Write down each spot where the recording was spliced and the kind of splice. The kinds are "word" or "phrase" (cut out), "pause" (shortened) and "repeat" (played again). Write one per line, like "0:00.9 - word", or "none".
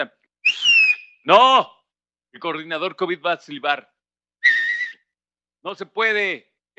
none